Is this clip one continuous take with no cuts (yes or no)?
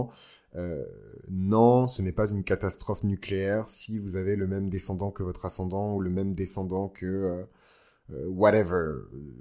yes